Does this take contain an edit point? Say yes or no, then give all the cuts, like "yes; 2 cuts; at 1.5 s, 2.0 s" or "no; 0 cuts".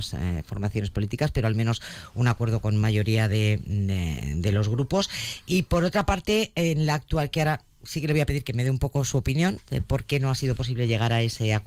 no; 0 cuts